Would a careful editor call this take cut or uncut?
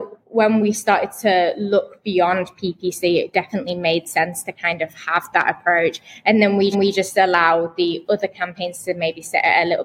cut